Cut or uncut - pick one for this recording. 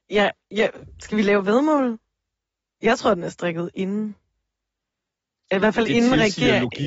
uncut